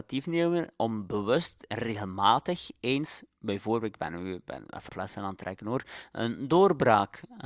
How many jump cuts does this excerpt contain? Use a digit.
1